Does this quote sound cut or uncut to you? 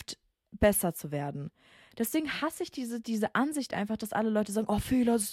uncut